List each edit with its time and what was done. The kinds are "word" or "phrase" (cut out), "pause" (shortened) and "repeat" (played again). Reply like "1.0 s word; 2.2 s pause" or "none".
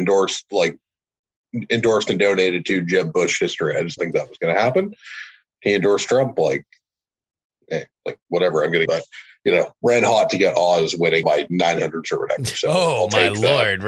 4.0 s word; 5.5 s pause; 8.0 s pause; 8.9 s phrase; 11.2 s phrase; 12.0 s word